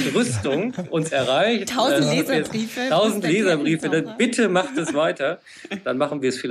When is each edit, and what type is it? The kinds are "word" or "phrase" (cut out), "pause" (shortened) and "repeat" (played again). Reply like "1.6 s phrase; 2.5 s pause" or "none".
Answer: none